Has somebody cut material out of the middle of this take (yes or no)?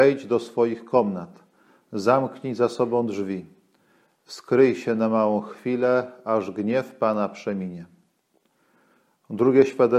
no